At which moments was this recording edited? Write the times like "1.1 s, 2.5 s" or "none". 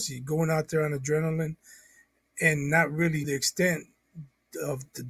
3.2 s